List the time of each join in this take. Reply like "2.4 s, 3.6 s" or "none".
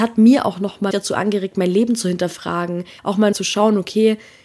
0.9 s, 3.0 s, 3.3 s